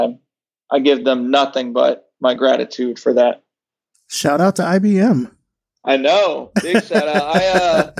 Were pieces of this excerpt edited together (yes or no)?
no